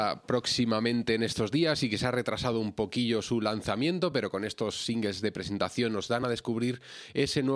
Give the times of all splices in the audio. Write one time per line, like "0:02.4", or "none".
none